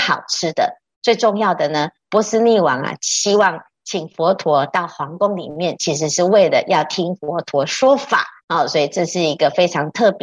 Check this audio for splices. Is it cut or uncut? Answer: cut